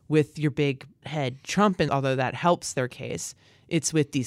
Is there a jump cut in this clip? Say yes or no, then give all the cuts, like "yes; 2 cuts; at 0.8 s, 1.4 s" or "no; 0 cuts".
yes; 2 cuts; at 1.0 s, 1.9 s